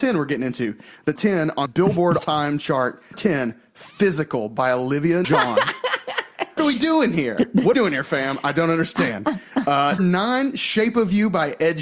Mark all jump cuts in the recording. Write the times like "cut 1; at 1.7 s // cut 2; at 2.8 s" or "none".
cut 1; at 1.2 s // cut 2; at 1.7 s // cut 3; at 2.2 s // cut 4; at 3.1 s // cut 5; at 5.2 s // cut 6; at 6.6 s // cut 7; at 7.7 s // cut 8; at 10.0 s